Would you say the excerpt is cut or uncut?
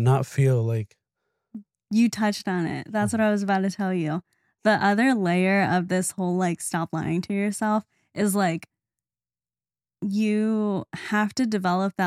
uncut